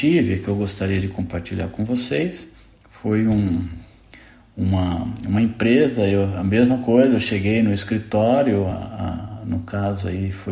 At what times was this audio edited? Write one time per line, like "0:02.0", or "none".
none